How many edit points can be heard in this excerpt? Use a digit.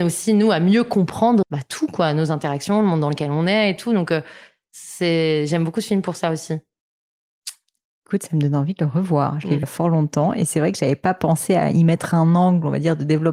2